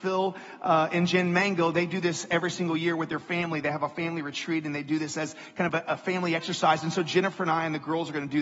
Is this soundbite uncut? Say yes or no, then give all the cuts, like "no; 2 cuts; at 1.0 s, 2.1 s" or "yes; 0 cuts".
yes; 0 cuts